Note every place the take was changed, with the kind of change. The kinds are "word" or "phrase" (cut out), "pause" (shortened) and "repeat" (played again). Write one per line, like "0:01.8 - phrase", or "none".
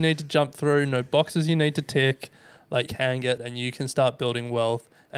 0:02.9 - word
0:03.4 - word